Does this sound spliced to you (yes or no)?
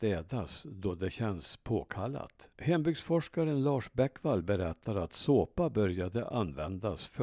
yes